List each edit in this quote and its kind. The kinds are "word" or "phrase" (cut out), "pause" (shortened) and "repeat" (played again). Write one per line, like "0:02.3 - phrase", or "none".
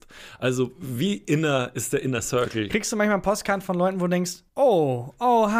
0:04.5 - pause